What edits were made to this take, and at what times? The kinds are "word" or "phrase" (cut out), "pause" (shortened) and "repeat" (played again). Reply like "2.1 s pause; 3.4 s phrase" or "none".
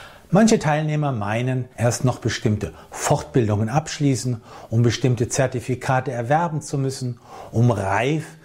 1.7 s pause